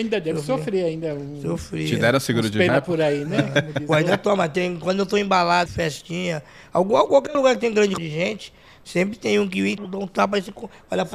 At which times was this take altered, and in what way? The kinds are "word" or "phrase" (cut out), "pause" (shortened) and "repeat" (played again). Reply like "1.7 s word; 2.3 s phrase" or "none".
2.7 s word; 5.7 s word; 8.0 s word; 9.8 s word